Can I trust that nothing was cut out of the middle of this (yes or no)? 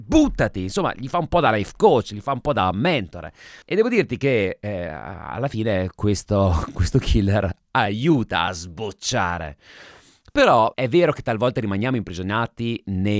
no